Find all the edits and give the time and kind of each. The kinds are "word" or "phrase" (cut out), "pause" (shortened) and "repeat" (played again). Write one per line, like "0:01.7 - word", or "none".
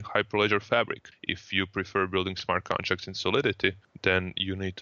none